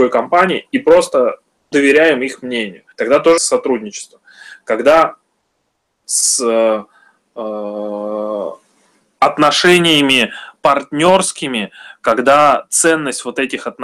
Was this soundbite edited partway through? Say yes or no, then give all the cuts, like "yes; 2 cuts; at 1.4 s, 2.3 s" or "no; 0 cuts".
yes; 4 cuts; at 1.7 s, 2.9 s, 3.4 s, 6.0 s